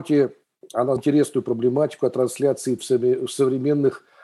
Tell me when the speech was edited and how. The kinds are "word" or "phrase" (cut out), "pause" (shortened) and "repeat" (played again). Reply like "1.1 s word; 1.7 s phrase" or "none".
1.0 s word; 2.8 s word